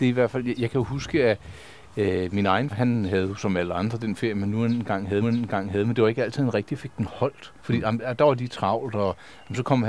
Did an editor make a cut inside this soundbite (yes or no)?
yes